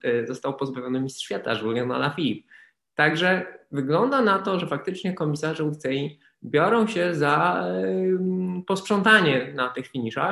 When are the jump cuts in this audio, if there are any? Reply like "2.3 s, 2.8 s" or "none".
none